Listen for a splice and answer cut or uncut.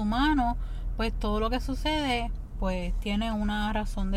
uncut